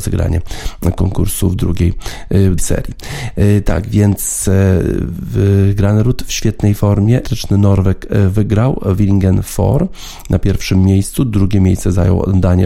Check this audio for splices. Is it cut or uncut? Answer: cut